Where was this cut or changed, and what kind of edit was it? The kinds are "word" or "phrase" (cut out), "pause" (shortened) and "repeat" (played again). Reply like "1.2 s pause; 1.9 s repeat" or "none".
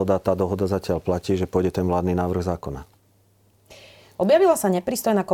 none